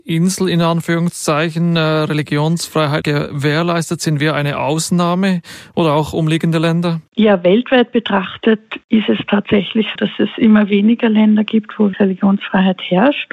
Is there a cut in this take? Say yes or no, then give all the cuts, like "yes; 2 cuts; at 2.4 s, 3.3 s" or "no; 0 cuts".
yes; 4 cuts; at 3.0 s, 8.8 s, 10.0 s, 11.9 s